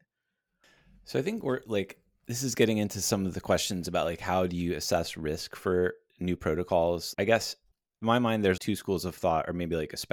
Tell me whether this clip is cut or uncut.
cut